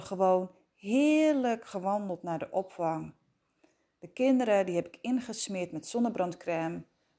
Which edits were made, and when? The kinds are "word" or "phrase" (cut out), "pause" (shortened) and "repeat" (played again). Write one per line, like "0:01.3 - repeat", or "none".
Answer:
none